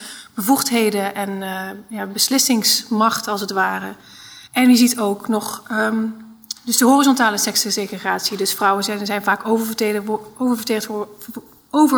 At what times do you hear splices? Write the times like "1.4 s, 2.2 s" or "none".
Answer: 4.5 s